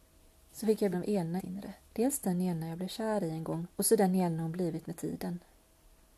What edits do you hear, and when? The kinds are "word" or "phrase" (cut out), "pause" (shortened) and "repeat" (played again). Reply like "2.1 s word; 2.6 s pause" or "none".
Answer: 0.9 s word; 1.4 s word; 1.8 s pause; 3.7 s pause